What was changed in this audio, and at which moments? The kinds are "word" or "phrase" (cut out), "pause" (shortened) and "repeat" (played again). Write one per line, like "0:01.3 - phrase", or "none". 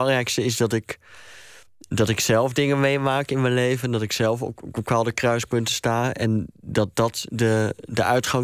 none

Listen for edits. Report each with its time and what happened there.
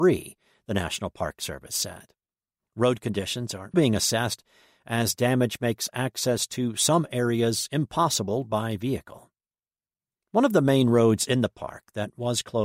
0:03.7 - word

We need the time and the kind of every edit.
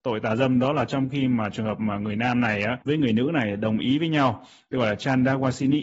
0:02.8 - pause

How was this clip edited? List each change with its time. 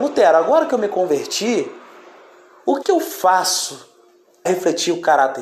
0:02.8 - word
0:04.5 - word

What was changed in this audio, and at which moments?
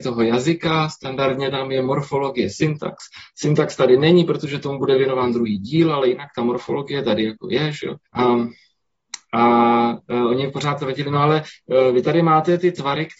0:08.0 - pause

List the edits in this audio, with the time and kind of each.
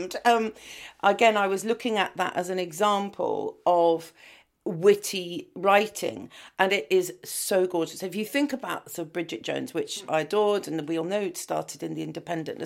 none

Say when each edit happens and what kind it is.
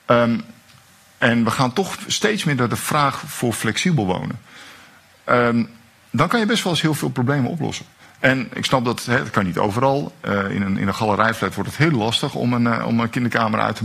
none

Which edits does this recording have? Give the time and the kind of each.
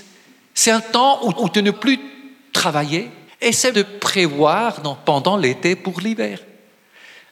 0:01.3 - repeat
0:01.7 - word
0:03.3 - pause
0:03.7 - word

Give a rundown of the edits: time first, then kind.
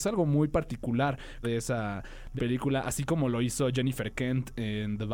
0:01.4 - phrase
0:02.4 - word

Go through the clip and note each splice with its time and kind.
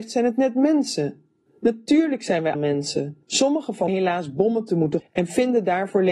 0:01.5 - pause
0:02.5 - word
0:03.2 - pause
0:03.9 - phrase
0:05.0 - word

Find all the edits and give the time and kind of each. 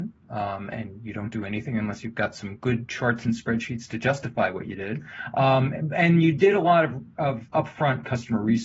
none

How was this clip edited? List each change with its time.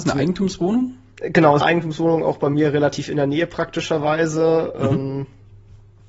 0:01.6 - word

